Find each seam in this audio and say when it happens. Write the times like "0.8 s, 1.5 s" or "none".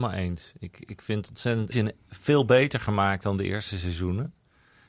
1.7 s